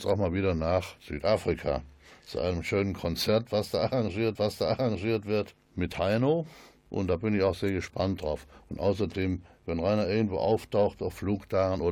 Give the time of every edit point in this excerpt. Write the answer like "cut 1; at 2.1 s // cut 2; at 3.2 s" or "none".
cut 1; at 4.4 s